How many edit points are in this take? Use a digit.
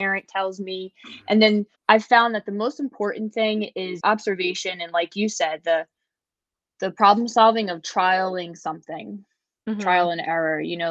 2